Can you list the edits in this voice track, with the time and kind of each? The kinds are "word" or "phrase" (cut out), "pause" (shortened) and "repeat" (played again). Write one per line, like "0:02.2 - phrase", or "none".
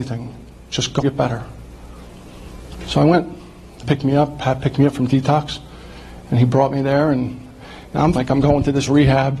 0:01.0 - word
0:03.8 - word
0:08.2 - word